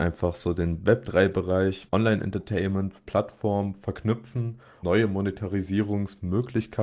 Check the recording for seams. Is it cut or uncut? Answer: cut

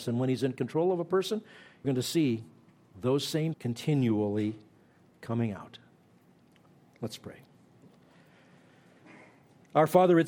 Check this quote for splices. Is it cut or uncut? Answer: cut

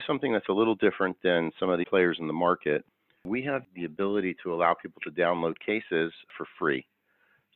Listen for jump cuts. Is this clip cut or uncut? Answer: cut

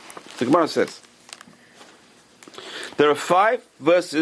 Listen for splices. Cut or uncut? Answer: uncut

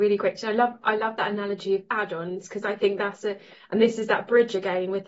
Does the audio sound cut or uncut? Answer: uncut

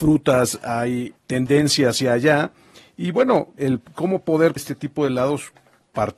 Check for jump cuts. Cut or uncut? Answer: cut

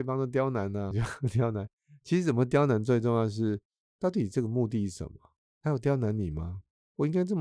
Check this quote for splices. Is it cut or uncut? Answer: cut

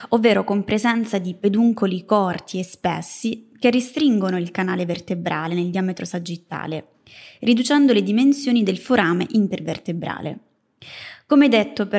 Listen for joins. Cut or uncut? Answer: uncut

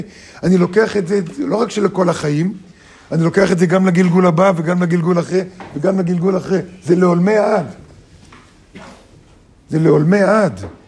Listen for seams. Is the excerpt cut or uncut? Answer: uncut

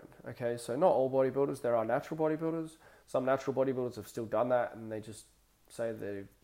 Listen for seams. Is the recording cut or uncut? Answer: uncut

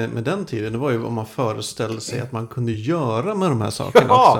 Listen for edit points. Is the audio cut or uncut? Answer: uncut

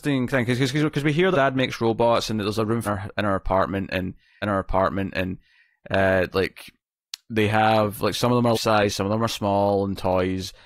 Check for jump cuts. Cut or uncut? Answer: cut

